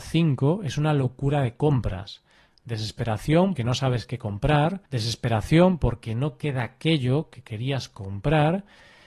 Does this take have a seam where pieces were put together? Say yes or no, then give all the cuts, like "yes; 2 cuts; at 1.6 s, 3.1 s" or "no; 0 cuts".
yes; 2 cuts; at 3.6 s, 4.9 s